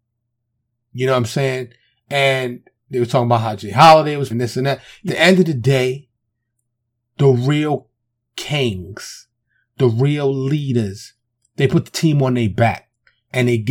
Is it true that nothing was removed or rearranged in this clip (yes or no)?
no